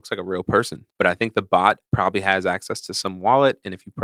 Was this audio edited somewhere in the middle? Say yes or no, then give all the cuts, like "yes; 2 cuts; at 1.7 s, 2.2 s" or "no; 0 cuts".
yes; 2 cuts; at 0.9 s, 1.9 s